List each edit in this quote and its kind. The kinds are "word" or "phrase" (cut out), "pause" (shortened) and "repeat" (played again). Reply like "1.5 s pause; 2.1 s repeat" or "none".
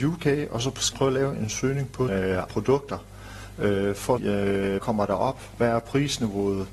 0.9 s word; 2.1 s word; 2.5 s word; 4.2 s word; 4.8 s word